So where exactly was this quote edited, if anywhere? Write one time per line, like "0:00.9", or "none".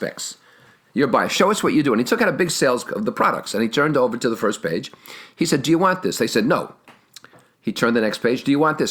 0:02.9